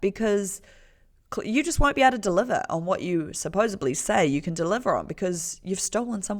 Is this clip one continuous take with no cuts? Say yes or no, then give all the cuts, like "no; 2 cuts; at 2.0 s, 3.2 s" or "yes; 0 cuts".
yes; 0 cuts